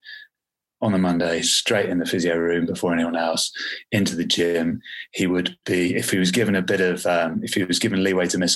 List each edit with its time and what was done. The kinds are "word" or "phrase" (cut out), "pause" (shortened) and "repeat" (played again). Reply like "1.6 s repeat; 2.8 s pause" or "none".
none